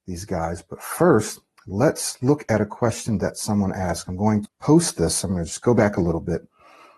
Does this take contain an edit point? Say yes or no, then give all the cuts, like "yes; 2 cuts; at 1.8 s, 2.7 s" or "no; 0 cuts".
yes; 1 cut; at 4.5 s